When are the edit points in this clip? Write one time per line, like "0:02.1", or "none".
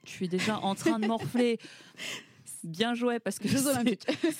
none

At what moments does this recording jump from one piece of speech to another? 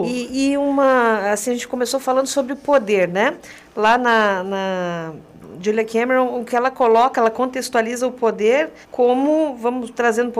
0:08.8

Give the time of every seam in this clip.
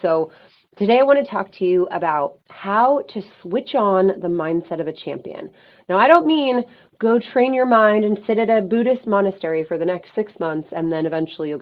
none

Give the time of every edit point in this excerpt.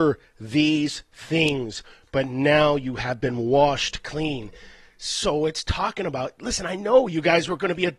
none

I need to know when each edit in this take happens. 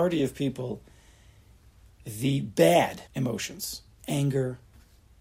0:03.1

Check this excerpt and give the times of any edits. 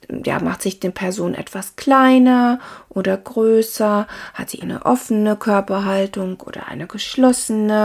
0:04.6

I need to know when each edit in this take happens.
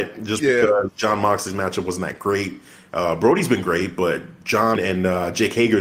0:04.8

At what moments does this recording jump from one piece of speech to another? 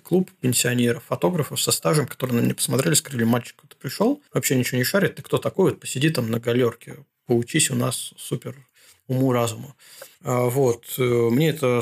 0:04.3
0:10.1

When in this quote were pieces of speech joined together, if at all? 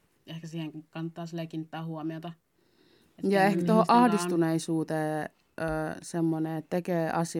none

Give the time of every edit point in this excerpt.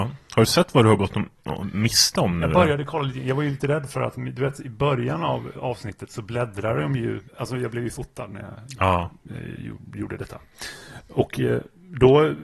0:05.5
0:07.3

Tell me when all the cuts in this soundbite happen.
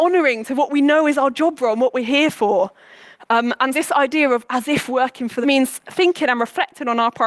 0:03.7
0:05.4

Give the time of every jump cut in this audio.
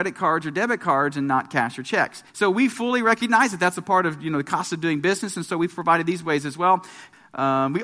0:02.3

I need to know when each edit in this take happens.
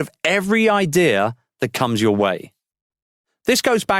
none

